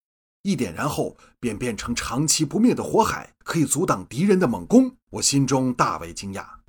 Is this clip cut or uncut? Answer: cut